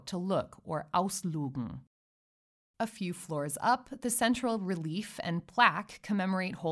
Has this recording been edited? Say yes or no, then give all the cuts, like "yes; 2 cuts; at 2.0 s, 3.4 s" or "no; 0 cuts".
no; 0 cuts